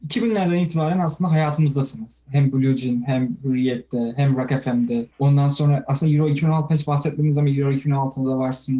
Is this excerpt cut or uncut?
cut